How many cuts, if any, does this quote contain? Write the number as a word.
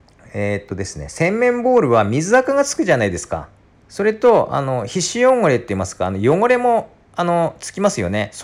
one